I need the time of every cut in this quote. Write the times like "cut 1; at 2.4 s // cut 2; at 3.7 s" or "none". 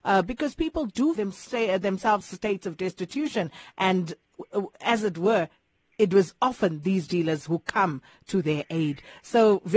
cut 1; at 1.2 s // cut 2; at 2.2 s // cut 3; at 7.1 s

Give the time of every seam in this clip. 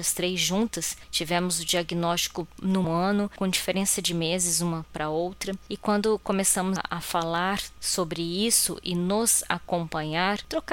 cut 1; at 2.8 s

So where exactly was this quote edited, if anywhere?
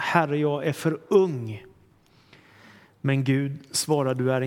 none

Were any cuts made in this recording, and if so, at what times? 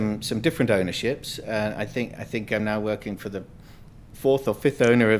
none

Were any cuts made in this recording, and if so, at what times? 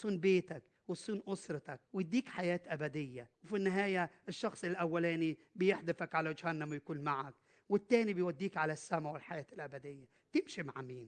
cut 1; at 1.9 s // cut 2; at 3.3 s

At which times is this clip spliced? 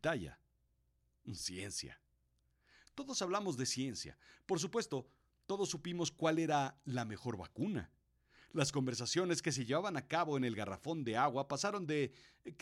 none

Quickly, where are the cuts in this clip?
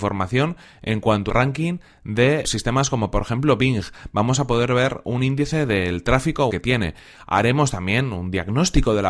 cut 1; at 1.3 s // cut 2; at 2.4 s // cut 3; at 6.5 s

